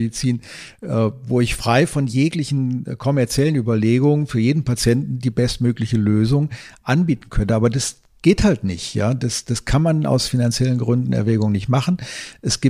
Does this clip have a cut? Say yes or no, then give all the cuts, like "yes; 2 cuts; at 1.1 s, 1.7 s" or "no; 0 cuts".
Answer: no; 0 cuts